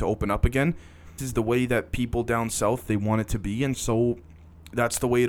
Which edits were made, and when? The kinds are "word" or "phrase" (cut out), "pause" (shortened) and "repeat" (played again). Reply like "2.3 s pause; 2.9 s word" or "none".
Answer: 1.2 s phrase